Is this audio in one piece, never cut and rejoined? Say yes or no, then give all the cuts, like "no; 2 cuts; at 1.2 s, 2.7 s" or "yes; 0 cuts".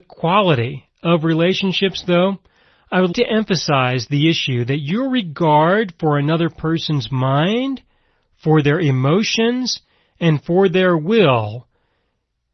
no; 1 cut; at 3.1 s